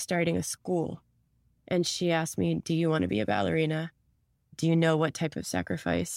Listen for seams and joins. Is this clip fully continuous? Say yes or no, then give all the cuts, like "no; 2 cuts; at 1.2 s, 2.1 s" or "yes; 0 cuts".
yes; 0 cuts